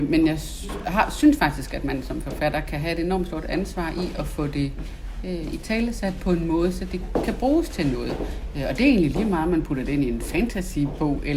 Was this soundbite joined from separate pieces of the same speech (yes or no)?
no